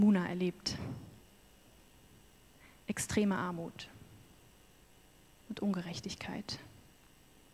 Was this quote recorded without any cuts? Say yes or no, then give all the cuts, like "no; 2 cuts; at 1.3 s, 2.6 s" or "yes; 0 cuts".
yes; 0 cuts